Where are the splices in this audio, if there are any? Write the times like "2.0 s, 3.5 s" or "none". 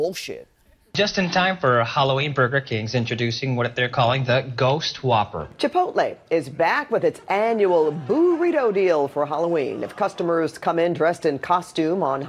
none